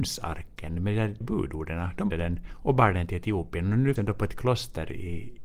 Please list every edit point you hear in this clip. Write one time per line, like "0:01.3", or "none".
0:01.2
0:02.1
0:04.0